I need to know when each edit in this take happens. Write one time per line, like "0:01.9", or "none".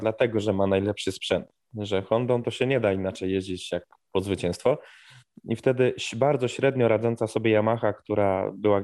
none